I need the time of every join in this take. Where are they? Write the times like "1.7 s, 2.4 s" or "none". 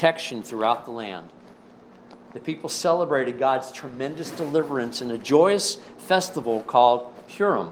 none